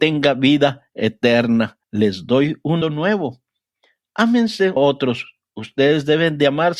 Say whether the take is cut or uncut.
cut